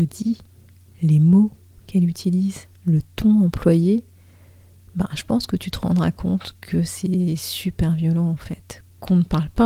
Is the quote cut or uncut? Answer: uncut